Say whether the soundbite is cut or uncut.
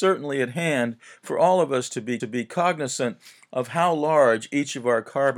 cut